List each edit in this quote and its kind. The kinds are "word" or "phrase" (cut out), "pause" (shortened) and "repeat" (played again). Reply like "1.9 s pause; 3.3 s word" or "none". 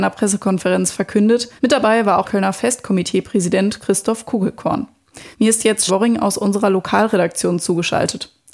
1.6 s pause; 2.2 s word; 5.3 s pause; 5.9 s word